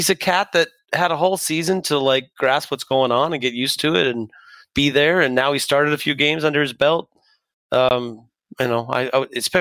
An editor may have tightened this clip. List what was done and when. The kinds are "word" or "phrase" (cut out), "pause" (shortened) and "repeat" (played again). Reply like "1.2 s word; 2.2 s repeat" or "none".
none